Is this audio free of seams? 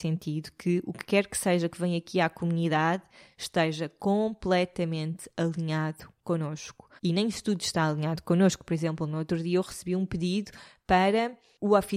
no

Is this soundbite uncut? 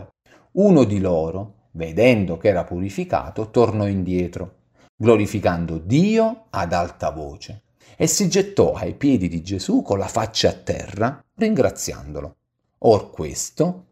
yes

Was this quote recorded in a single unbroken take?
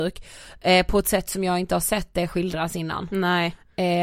yes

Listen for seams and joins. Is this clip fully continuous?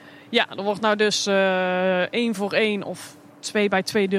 yes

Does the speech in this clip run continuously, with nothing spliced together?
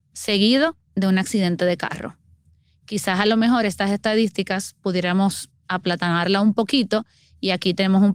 yes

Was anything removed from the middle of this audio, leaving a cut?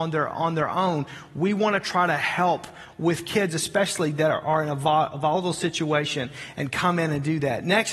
no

